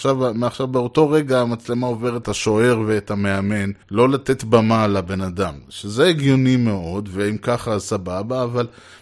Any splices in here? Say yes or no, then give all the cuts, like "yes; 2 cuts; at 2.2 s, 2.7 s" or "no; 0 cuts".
yes; 2 cuts; at 2.2 s, 3.8 s